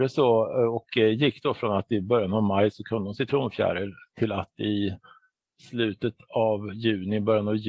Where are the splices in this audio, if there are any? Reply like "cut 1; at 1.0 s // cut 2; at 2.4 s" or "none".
none